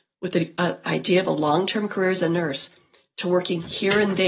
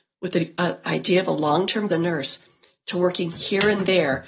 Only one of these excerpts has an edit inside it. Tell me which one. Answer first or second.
second